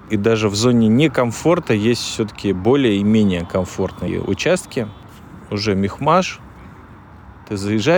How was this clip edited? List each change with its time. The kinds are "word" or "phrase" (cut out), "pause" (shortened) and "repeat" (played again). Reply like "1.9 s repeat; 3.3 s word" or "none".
none

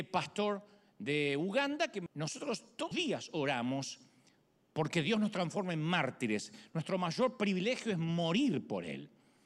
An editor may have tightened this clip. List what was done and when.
2.1 s word; 2.9 s word

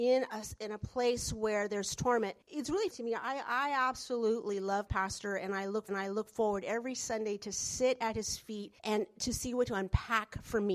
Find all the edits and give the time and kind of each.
2.4 s pause; 2.9 s word; 4.9 s word; 5.9 s repeat; 8.8 s pause; 9.7 s phrase

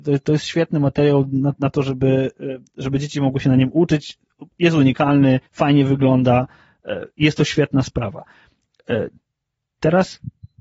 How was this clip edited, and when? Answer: 5.5 s pause

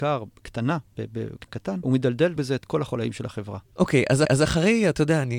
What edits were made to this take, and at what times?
1.5 s word; 1.8 s word; 2.4 s phrase; 3.7 s pause; 4.3 s repeat

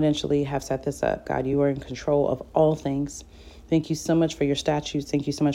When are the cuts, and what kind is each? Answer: none

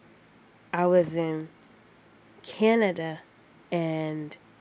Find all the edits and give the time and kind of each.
none

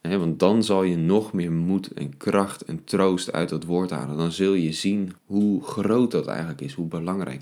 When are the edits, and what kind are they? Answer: 5.2 s pause

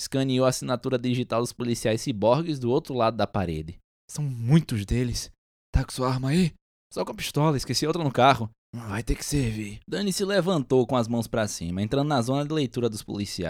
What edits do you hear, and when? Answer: none

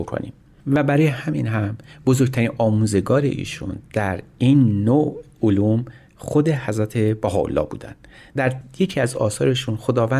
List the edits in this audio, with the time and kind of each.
none

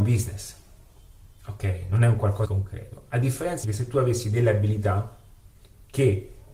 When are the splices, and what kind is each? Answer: 2.4 s word; 3.6 s word

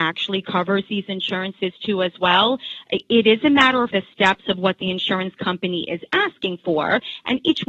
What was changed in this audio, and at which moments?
3.9 s word

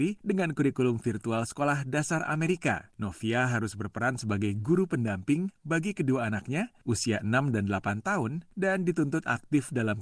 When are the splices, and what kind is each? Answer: none

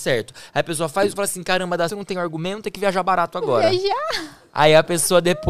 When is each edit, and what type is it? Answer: 1.2 s word; 1.9 s word; 2.6 s word

